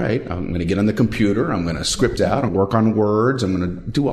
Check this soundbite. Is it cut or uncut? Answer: cut